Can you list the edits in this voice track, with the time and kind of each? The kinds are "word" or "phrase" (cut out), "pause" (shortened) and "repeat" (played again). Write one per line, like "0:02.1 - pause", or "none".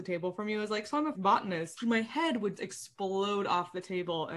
0:01.1 - word
0:01.8 - word
0:02.6 - word